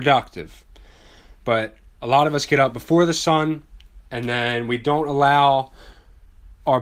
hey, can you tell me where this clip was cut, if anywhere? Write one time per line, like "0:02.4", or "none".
none